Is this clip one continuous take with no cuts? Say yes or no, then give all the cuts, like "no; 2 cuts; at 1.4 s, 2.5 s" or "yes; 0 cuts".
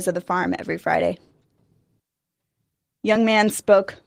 yes; 0 cuts